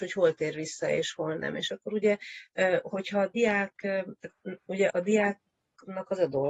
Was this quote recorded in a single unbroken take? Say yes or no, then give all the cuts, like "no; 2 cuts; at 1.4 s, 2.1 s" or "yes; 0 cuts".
no; 1 cut; at 4.9 s